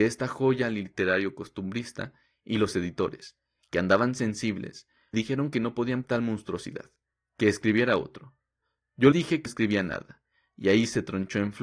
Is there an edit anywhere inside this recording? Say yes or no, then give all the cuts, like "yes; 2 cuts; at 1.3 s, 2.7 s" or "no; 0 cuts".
yes; 4 cuts; at 5.1 s, 6.0 s, 9.1 s, 9.5 s